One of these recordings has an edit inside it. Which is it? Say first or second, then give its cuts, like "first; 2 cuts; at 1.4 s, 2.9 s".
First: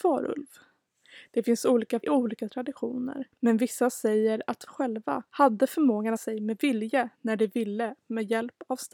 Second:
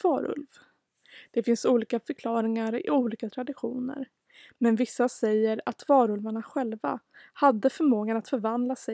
first; 5 cuts; at 2.0 s, 3.3 s, 4.7 s, 5.3 s, 6.2 s